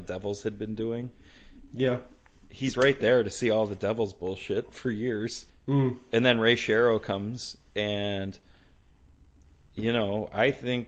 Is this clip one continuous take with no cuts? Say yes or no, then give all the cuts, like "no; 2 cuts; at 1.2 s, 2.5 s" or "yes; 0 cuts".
no; 1 cut; at 5.5 s